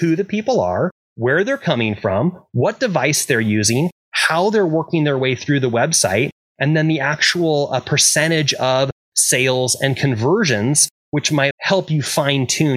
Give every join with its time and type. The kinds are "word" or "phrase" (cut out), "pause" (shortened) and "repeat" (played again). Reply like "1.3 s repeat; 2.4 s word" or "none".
11.5 s word